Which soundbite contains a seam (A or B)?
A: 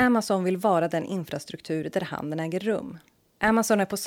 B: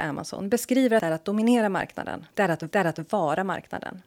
B